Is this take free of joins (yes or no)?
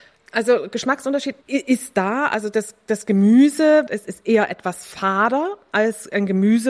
no